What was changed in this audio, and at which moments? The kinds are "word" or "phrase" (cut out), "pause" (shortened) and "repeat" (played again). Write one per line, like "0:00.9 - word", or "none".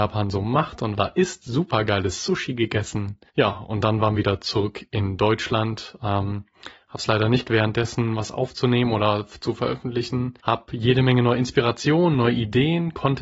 0:01.0 - phrase
0:03.3 - pause
0:04.1 - phrase
0:07.4 - word
0:10.4 - pause